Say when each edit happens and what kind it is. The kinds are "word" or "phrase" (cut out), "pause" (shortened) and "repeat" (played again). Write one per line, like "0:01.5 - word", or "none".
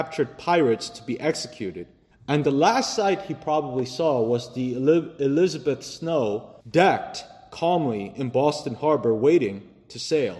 0:02.1 - pause
0:06.6 - pause